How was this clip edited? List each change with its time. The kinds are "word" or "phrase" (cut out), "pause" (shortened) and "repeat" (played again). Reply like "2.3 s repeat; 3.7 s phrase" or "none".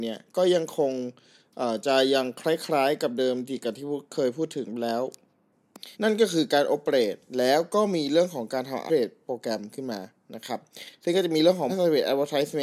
5.9 s pause; 8.9 s phrase; 11.7 s word